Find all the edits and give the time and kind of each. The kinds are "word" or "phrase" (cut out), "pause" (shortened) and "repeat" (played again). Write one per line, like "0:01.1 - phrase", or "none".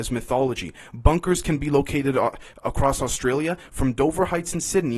none